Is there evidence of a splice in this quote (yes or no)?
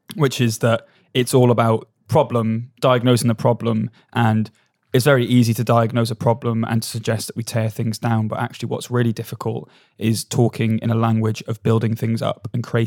no